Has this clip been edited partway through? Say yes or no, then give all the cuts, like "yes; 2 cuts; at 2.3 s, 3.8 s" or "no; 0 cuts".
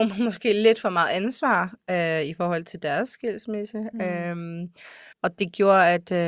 yes; 1 cut; at 5.1 s